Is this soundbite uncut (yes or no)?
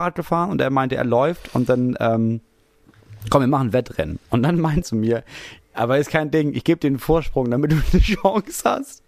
no